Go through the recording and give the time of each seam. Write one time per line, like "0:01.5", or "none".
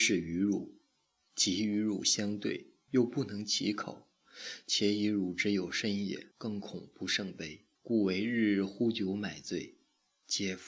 0:06.3
0:07.7